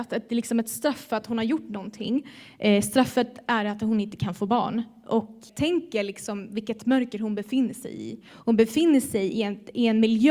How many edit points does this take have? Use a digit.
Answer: 1